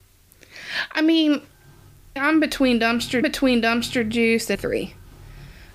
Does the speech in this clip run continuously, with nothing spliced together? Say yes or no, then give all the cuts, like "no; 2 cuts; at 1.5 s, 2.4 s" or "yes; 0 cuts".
no; 3 cuts; at 2.2 s, 3.2 s, 4.5 s